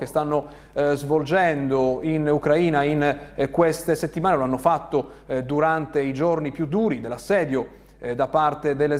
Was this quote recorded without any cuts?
yes; 0 cuts

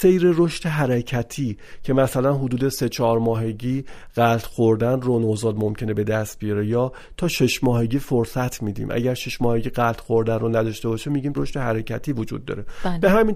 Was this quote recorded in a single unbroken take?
no; 1 cut; at 11.3 s

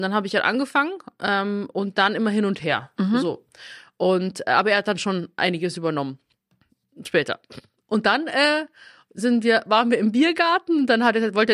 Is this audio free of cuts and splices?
yes; 0 cuts

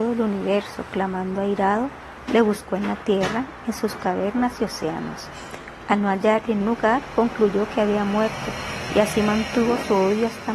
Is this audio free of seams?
no; 1 cut; at 6.6 s

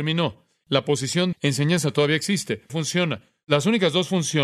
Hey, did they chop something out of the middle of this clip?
yes; 2 cuts; at 1.3 s, 2.7 s

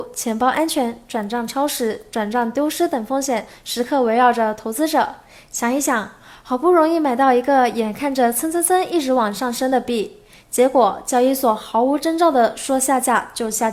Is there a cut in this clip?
no; 0 cuts

